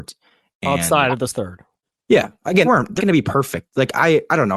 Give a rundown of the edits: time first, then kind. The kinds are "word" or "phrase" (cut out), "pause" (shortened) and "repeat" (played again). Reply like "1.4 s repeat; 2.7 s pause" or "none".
1.3 s phrase; 1.8 s pause; 2.6 s word; 3.0 s word